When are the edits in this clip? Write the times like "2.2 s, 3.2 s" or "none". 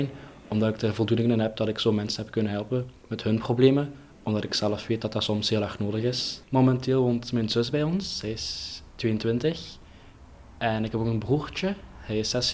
3.0 s, 6.4 s